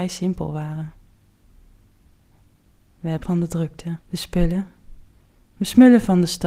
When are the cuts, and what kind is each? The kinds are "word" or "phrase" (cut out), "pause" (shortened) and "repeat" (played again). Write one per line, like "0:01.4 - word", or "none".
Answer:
0:03.2 - word
0:04.0 - pause